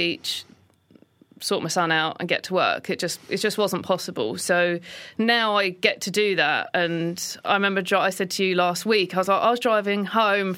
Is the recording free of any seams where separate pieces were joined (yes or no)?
yes